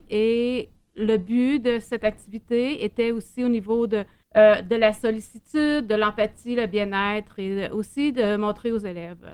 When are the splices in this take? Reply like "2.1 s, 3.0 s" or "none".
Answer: 4.2 s